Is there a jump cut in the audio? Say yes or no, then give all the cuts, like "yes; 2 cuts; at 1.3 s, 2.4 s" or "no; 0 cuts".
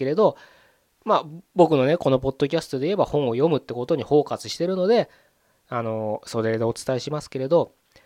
no; 0 cuts